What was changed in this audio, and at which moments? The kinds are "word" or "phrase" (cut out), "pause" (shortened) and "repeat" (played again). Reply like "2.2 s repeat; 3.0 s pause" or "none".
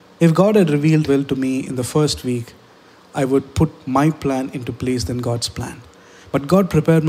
1.1 s word